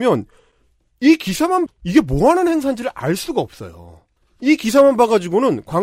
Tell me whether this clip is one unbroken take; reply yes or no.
no